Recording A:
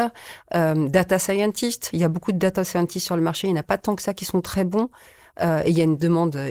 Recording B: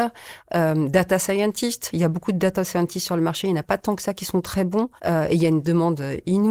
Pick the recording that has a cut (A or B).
B